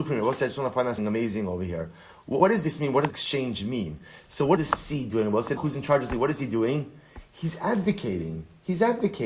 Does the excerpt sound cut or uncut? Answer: cut